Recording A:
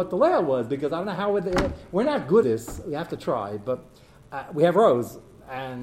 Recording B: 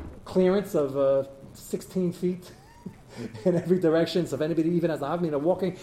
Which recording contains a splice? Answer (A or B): A